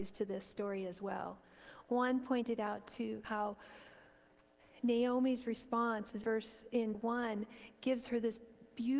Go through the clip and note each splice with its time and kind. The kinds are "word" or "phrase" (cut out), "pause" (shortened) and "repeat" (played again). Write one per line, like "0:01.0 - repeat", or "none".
0:03.2 - word
0:06.2 - phrase
0:06.9 - word